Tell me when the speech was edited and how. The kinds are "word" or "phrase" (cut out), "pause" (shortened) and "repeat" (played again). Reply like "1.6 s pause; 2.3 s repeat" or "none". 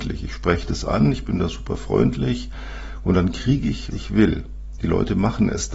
3.9 s word